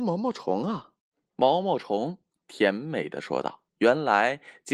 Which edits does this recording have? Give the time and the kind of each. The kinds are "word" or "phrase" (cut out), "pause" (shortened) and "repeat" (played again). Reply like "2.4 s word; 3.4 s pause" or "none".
1.0 s pause; 3.7 s pause